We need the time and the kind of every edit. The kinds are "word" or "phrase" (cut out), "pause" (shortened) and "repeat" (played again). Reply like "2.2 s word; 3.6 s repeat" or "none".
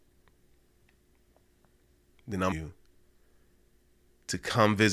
2.5 s word